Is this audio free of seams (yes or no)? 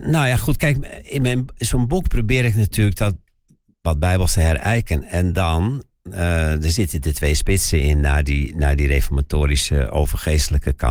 yes